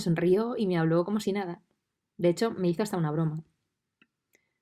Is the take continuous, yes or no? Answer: yes